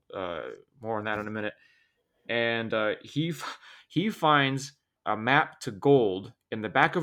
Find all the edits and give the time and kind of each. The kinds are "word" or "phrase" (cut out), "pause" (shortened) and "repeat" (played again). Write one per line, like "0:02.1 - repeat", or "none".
none